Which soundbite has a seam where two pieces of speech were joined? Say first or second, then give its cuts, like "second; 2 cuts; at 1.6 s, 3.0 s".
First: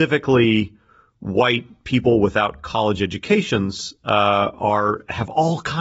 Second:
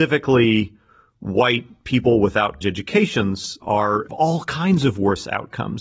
second; 3 cuts; at 2.6 s, 3.6 s, 4.1 s